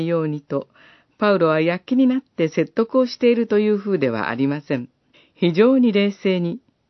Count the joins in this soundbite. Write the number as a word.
one